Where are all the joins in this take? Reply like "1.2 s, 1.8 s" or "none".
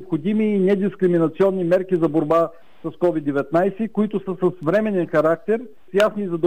4.3 s